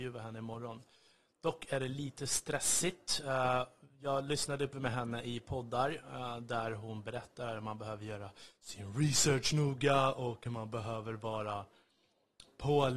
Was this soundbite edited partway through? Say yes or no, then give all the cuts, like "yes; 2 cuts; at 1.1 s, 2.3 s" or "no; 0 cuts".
yes; 1 cut; at 4.7 s